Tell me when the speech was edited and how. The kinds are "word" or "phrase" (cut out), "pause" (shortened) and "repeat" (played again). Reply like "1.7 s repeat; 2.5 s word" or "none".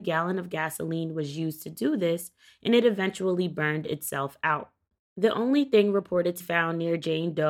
6.4 s word